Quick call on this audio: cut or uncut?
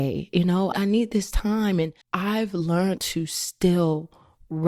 cut